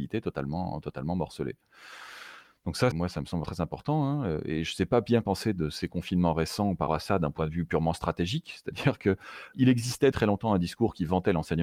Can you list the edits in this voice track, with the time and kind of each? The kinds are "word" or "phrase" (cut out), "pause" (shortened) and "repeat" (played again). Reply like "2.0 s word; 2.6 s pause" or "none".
2.9 s word; 3.4 s word; 5.2 s word; 6.9 s word; 9.5 s word; 10.1 s word